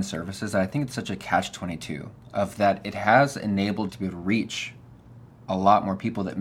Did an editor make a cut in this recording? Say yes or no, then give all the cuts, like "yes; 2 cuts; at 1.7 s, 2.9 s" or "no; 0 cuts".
yes; 1 cut; at 3.9 s